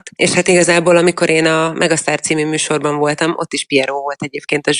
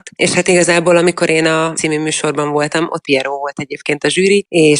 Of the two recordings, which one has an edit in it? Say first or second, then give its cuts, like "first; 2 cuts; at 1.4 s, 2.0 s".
second; 2 cuts; at 1.7 s, 3.0 s